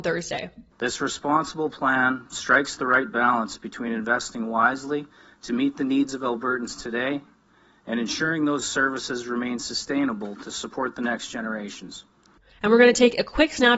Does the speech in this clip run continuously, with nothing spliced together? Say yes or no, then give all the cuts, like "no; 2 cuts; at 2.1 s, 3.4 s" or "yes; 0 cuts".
yes; 0 cuts